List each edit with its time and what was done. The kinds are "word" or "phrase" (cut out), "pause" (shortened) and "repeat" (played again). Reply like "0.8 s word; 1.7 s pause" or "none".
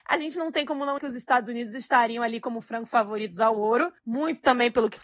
1.0 s word; 4.0 s pause